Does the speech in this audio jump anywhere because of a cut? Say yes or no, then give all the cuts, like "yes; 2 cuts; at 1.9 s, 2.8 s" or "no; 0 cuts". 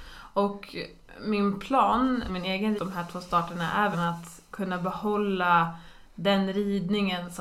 yes; 4 cuts; at 2.3 s, 2.8 s, 3.9 s, 4.5 s